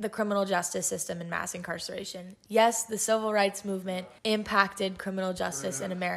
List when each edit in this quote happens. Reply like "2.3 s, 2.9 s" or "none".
4.2 s